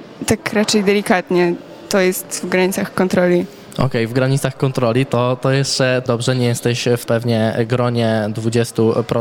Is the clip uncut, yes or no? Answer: no